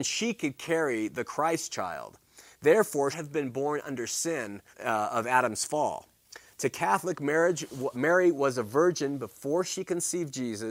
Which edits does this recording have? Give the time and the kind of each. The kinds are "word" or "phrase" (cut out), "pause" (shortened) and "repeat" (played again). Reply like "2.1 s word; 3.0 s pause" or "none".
3.1 s phrase; 4.7 s pause; 7.9 s word